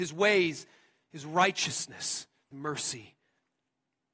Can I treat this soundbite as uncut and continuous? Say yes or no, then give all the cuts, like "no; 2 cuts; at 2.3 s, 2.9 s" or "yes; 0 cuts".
no; 1 cut; at 2.5 s